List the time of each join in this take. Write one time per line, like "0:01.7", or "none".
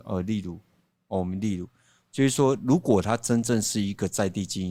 none